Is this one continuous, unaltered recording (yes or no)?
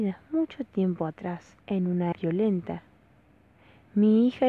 no